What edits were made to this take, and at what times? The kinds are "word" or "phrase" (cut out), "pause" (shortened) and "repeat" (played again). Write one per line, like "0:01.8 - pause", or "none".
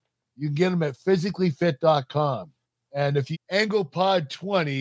0:02.6 - pause
0:03.3 - word